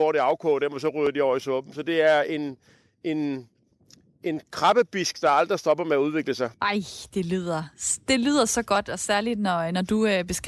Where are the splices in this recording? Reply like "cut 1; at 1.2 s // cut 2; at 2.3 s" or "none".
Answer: cut 1; at 6.5 s

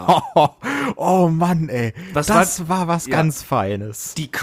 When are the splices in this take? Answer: none

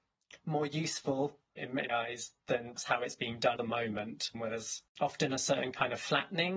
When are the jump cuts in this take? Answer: cut 1; at 1.6 s // cut 2; at 1.9 s // cut 3; at 2.8 s // cut 4; at 3.6 s // cut 5; at 4.3 s // cut 6; at 4.9 s

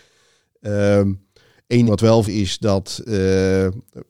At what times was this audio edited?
cut 1; at 1.9 s // cut 2; at 2.2 s

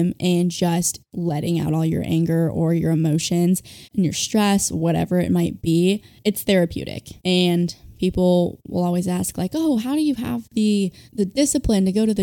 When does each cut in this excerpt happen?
cut 1; at 3.8 s // cut 2; at 7.2 s // cut 3; at 11.1 s

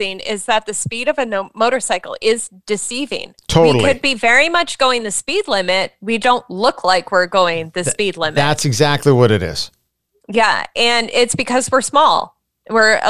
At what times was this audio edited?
cut 1; at 6.2 s

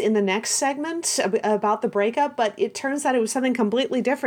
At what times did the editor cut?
none

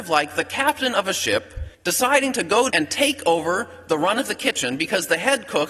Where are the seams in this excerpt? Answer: cut 1; at 1.7 s // cut 2; at 2.7 s

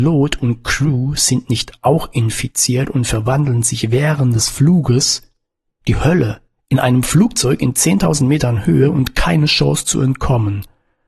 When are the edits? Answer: none

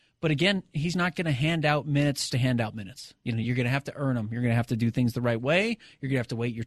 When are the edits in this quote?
cut 1; at 0.9 s // cut 2; at 2.3 s

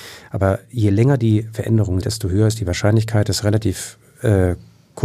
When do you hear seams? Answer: cut 1; at 2.0 s

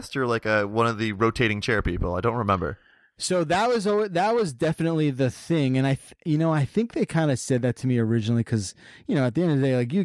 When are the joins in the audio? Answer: none

